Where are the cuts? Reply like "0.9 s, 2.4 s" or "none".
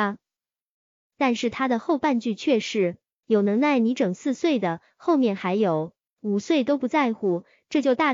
none